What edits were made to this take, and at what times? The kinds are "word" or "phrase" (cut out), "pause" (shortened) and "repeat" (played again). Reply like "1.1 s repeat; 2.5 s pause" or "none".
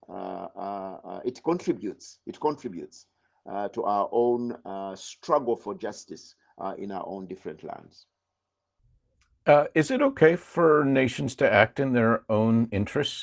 none